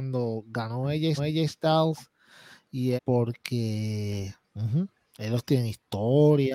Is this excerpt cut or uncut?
cut